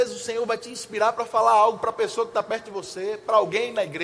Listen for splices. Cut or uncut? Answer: uncut